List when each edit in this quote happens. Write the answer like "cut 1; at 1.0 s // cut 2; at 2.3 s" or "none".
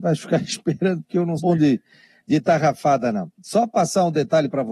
cut 1; at 1.4 s // cut 2; at 3.3 s